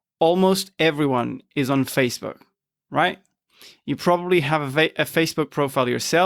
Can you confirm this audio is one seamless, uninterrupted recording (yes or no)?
yes